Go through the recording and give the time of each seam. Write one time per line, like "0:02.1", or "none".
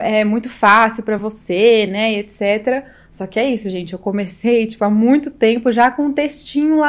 none